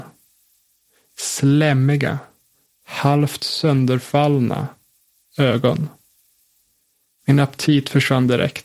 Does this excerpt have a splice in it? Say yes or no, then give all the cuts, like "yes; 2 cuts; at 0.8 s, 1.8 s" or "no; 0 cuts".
no; 0 cuts